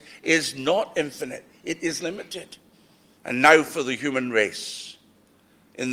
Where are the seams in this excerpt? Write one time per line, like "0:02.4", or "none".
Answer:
0:02.7

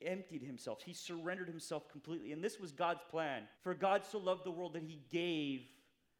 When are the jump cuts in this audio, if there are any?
0:03.5

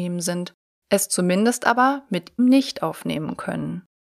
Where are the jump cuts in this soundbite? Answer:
0:02.4

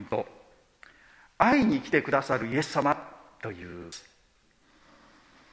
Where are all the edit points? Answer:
none

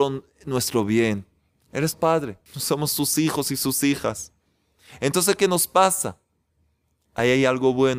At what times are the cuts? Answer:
0:01.9
0:02.5
0:05.4

